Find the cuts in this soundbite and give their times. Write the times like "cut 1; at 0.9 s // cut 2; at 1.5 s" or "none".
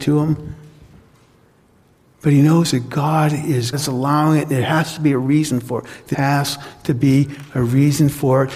cut 1; at 3.7 s // cut 2; at 6.1 s

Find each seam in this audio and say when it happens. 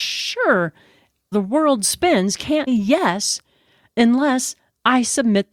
cut 1; at 1.3 s // cut 2; at 2.7 s

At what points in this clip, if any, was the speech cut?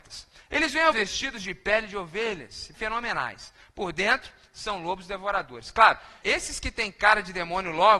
cut 1; at 0.9 s // cut 2; at 2.7 s // cut 3; at 6.2 s

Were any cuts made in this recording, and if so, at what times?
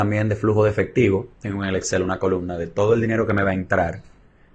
cut 1; at 1.3 s

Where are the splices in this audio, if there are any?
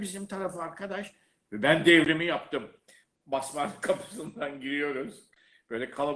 none

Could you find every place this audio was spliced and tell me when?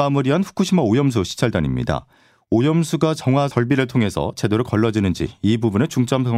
none

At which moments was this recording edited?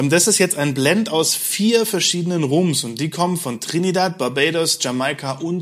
none

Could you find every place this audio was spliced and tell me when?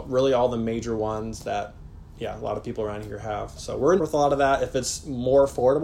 cut 1; at 4.0 s

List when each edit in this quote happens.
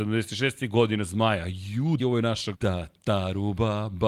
cut 1; at 2.0 s // cut 2; at 2.5 s

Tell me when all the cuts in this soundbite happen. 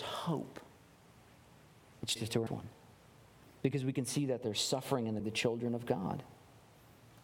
cut 1; at 2.2 s // cut 2; at 2.5 s // cut 3; at 5.2 s

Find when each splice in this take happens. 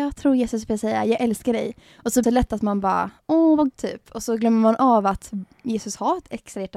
cut 1; at 2.2 s // cut 2; at 3.7 s

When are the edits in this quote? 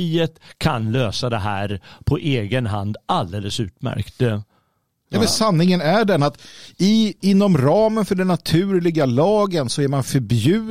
none

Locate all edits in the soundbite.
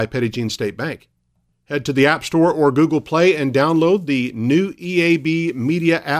none

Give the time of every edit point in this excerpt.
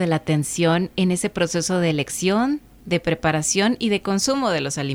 none

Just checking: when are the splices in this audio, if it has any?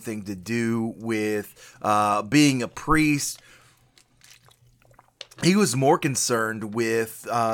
none

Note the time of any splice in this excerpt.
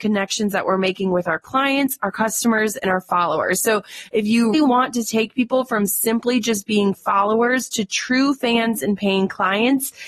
cut 1; at 4.5 s

